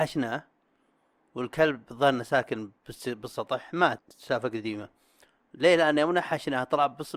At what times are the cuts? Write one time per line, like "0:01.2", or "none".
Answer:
0:04.0